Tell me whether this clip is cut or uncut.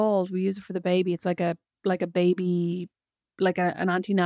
uncut